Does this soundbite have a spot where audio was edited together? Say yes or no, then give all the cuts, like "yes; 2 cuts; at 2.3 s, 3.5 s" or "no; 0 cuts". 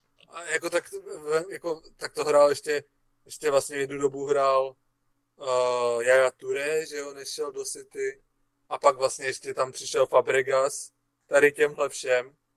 no; 0 cuts